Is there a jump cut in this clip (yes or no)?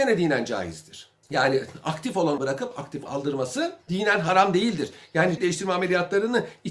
yes